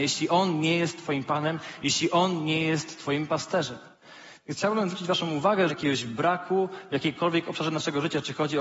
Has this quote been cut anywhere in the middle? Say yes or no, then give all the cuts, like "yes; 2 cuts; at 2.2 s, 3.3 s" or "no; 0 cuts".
yes; 1 cut; at 5.7 s